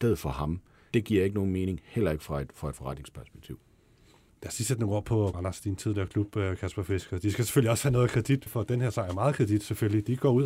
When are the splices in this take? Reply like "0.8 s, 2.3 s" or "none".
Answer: 0.9 s, 5.3 s, 8.5 s